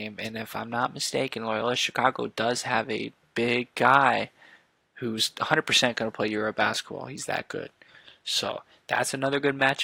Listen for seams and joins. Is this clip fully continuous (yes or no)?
yes